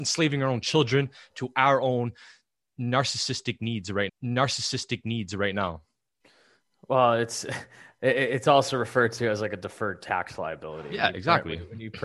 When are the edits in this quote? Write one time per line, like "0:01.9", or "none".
0:04.1